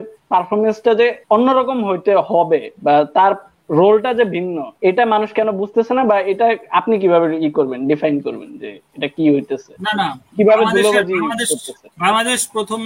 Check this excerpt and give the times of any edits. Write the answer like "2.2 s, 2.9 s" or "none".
1.2 s, 4.8 s, 10.3 s, 11.9 s